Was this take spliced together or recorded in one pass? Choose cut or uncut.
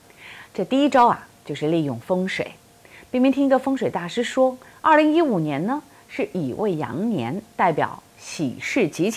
uncut